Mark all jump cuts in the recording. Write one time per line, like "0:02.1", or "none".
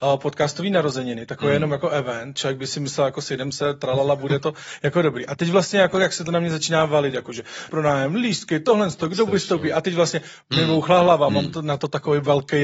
0:07.7
0:10.4